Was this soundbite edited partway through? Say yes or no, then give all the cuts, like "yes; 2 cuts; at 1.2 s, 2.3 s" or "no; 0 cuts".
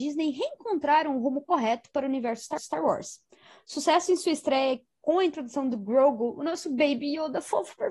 yes; 1 cut; at 2.6 s